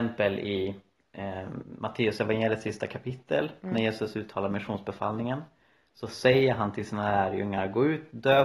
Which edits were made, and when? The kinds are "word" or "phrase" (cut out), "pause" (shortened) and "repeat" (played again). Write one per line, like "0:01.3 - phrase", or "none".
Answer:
none